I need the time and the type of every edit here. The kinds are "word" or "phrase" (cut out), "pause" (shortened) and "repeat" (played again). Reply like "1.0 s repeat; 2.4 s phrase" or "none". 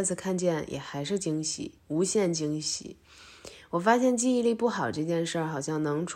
1.8 s pause